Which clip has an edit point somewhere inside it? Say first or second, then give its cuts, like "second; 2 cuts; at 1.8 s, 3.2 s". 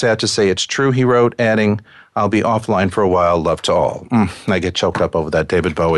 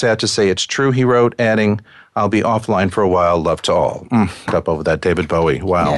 second; 1 cut; at 4.5 s